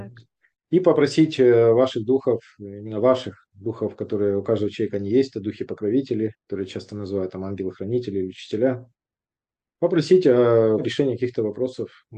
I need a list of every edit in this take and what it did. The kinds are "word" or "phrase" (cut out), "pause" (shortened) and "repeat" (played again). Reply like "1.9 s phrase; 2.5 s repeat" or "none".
6.3 s pause